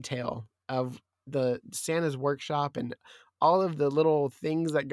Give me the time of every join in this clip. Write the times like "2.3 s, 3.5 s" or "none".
none